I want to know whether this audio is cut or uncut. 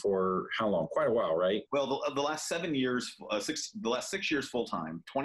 cut